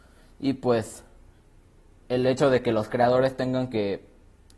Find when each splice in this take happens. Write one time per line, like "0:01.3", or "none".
none